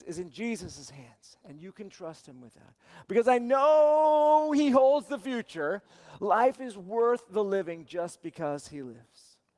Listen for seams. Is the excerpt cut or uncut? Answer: uncut